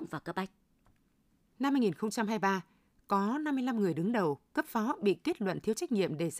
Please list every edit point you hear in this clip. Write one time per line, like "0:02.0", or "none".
none